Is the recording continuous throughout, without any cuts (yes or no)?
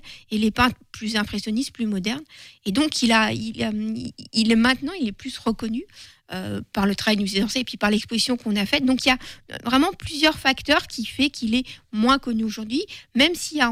yes